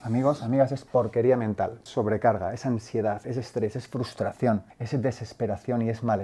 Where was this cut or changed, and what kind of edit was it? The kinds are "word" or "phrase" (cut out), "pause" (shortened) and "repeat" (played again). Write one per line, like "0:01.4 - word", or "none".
0:01.9 - word
0:04.7 - pause